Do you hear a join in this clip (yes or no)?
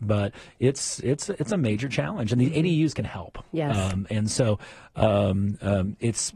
no